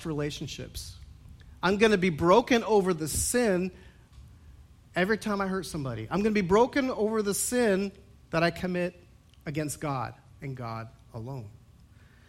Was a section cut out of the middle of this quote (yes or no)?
no